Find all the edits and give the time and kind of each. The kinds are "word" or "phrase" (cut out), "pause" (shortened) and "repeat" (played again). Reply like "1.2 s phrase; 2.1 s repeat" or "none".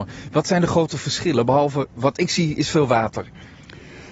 none